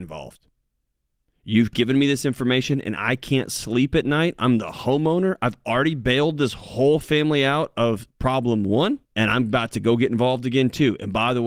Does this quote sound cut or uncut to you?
cut